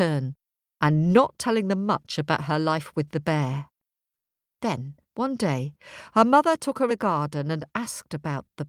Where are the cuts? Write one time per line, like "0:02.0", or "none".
0:05.0
0:06.9